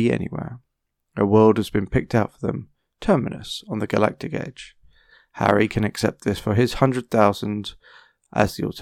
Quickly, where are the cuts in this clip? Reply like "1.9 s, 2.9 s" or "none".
none